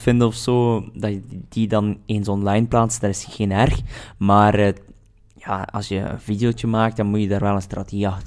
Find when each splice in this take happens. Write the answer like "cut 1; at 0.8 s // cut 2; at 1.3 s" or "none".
none